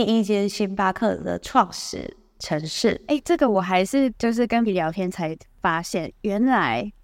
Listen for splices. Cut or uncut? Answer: cut